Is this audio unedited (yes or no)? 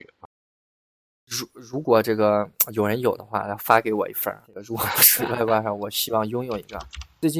no